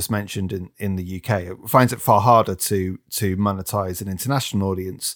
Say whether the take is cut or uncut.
uncut